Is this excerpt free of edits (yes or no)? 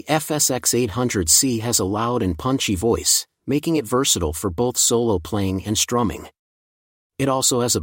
yes